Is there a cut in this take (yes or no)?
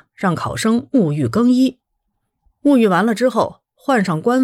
no